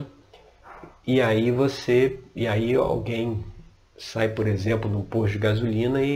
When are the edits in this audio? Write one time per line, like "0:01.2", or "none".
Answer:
none